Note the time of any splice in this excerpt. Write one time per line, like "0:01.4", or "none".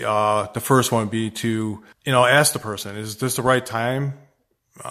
0:01.9